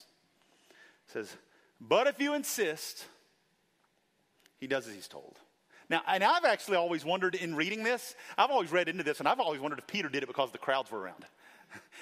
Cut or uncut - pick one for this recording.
uncut